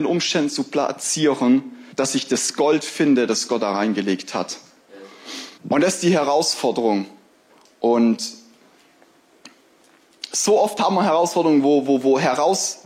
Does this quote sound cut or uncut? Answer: cut